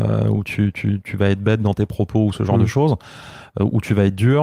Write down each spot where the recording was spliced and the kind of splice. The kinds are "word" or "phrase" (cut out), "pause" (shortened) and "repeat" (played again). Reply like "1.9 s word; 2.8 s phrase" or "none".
none